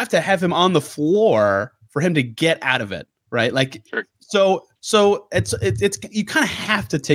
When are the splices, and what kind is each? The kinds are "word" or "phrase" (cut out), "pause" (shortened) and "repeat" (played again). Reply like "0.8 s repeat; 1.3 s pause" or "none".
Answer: 4.8 s pause